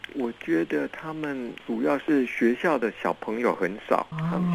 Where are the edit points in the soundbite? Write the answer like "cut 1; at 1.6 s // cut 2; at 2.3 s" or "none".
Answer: cut 1; at 1.6 s